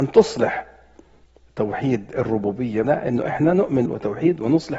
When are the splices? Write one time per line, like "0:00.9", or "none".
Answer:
0:02.8
0:03.9